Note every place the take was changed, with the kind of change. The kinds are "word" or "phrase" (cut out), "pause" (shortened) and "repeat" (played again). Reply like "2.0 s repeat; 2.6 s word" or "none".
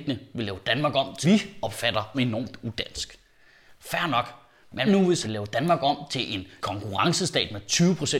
1.2 s word; 2.1 s word; 4.9 s word; 5.2 s word; 6.6 s word